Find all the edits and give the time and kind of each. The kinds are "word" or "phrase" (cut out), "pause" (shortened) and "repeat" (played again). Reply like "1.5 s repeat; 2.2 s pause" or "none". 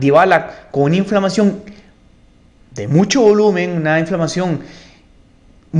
none